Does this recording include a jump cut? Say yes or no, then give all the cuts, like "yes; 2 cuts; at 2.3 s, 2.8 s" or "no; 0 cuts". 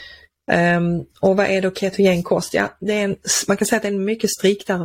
no; 0 cuts